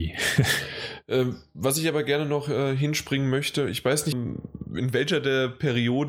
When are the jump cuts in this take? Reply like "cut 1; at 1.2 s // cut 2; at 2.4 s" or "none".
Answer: cut 1; at 4.1 s